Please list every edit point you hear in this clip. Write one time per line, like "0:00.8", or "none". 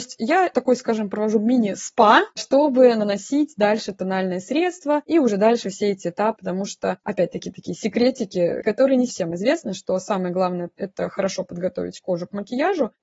0:06.4
0:09.1